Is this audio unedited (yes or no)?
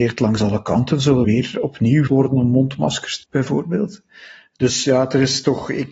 no